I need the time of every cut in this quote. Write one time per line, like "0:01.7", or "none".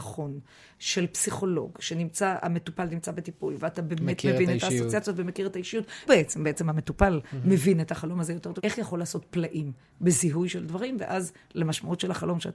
0:06.1
0:08.6